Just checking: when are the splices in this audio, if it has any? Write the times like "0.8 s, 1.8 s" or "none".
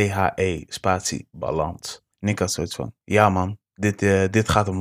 2.1 s, 3.0 s